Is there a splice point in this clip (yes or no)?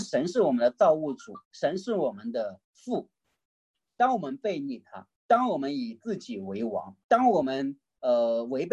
yes